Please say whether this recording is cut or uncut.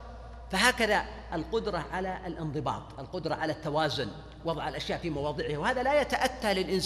uncut